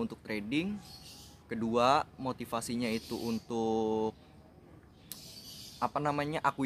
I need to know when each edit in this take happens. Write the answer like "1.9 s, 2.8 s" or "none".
1.4 s